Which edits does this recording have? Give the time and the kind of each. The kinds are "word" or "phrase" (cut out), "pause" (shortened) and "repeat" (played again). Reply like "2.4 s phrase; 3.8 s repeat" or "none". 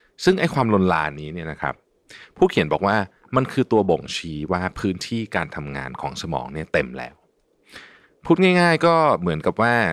none